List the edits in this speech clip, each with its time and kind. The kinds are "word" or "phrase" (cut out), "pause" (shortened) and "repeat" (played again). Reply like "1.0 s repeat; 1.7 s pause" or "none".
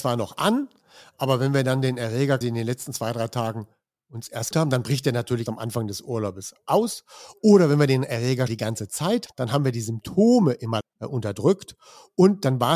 2.4 s word; 4.5 s word; 5.5 s word; 8.5 s word; 9.3 s word; 10.8 s word